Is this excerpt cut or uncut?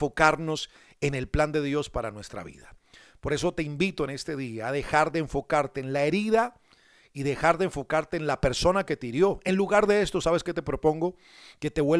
uncut